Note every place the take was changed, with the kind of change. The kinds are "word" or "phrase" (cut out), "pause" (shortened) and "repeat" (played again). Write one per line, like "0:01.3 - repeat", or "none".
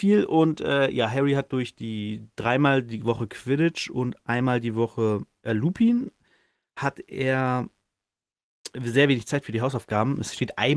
none

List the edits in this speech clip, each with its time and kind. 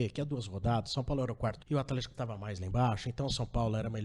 0:01.6 - word
0:02.1 - word

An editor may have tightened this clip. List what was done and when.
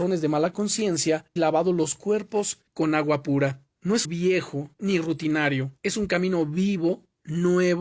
0:01.4 - word
0:02.7 - pause
0:03.7 - pause
0:04.0 - phrase
0:05.8 - pause

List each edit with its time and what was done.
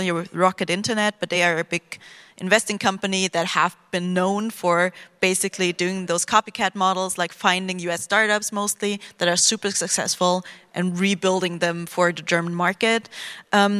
none

